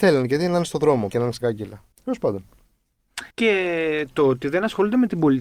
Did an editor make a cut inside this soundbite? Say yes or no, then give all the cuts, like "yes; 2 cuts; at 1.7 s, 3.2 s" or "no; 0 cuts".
yes; 4 cuts; at 1.1 s, 1.4 s, 1.9 s, 3.3 s